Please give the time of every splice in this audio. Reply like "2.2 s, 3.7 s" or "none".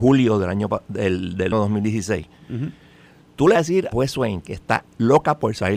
1.5 s, 3.5 s, 3.9 s